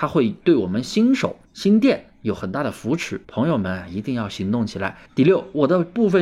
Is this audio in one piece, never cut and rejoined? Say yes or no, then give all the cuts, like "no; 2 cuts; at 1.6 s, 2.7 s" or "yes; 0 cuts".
no; 3 cuts; at 1.4 s, 3.2 s, 5.1 s